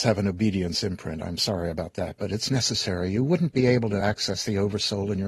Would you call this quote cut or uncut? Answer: uncut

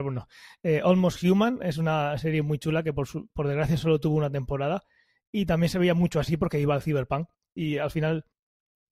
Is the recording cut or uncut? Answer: uncut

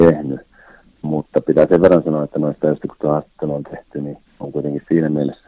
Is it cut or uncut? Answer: cut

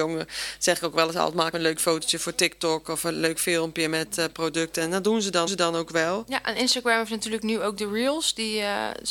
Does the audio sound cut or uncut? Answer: cut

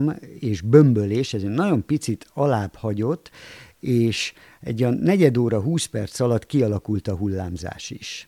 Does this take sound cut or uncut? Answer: uncut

